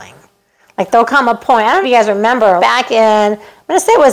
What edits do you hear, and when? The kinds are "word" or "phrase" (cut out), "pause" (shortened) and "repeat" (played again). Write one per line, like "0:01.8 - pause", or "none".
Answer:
0:01.8 - phrase
0:02.6 - word